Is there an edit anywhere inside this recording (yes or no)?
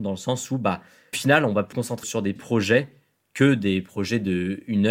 yes